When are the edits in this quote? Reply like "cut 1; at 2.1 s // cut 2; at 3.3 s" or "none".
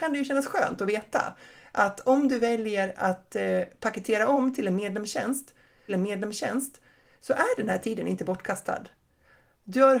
cut 1; at 5.9 s